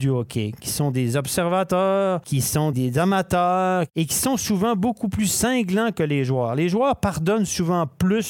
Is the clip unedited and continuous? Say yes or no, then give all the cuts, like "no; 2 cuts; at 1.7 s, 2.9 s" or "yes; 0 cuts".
no; 1 cut; at 2.7 s